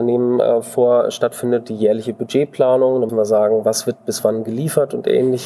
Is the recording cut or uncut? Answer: cut